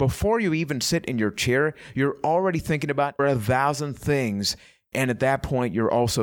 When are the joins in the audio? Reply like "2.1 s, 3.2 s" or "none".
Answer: 3.2 s